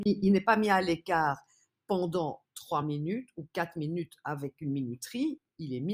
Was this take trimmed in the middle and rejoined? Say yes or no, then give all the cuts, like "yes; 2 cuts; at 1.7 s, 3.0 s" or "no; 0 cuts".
no; 0 cuts